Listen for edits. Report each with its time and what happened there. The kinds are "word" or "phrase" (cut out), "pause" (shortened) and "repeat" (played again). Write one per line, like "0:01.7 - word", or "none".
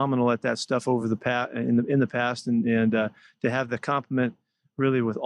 none